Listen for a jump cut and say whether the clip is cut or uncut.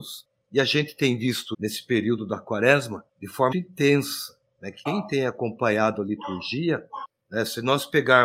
cut